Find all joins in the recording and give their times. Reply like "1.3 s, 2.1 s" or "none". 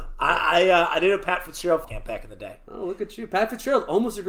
1.8 s

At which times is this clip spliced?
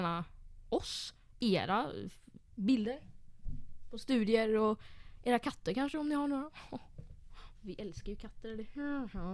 2.4 s

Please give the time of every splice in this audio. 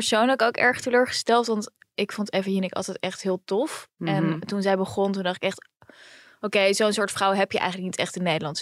none

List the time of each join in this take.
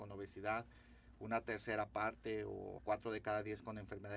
2.8 s

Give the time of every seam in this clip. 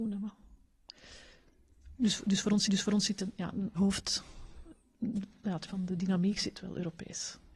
2.7 s, 3.7 s, 5.7 s

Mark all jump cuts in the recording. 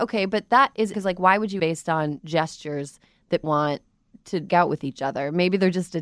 0.9 s, 1.6 s, 3.4 s, 4.5 s

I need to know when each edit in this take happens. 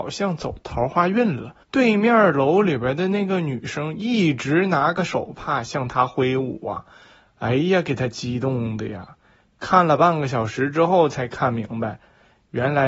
1.6 s

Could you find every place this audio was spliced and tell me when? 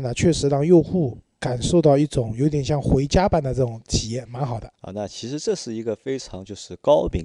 4.7 s

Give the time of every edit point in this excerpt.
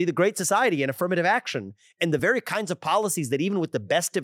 none

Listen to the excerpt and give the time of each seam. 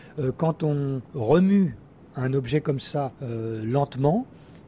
none

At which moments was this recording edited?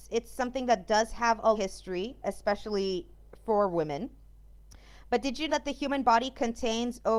1.5 s, 2.2 s, 5.5 s

